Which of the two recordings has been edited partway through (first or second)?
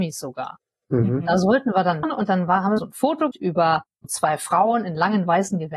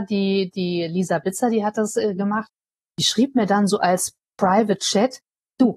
first